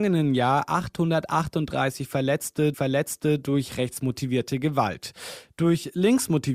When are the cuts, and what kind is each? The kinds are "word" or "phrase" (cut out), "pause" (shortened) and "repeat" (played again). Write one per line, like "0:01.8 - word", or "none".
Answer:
0:02.7 - repeat